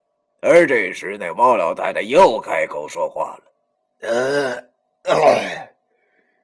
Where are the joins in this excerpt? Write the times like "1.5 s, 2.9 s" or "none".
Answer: 3.7 s